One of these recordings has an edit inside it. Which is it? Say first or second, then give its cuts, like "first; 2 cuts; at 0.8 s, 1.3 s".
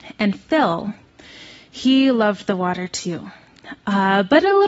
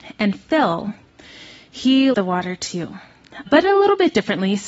second; 2 cuts; at 2.1 s, 3.5 s